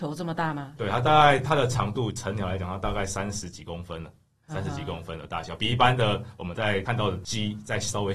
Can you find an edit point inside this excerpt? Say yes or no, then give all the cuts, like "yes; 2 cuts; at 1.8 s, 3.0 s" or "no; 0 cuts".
no; 0 cuts